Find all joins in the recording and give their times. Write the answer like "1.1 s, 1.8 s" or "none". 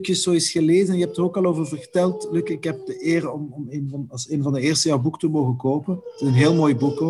none